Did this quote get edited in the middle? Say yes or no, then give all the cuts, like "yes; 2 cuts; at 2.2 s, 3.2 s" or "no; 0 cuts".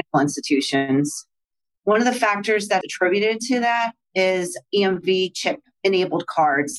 yes; 1 cut; at 2.8 s